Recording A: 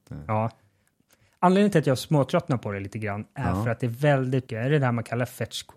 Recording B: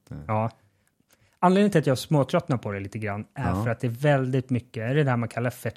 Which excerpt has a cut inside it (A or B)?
A